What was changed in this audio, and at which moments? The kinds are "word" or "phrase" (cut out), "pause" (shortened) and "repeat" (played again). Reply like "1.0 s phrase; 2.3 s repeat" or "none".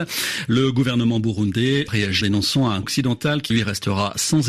1.9 s word; 2.2 s word; 2.8 s word; 3.5 s word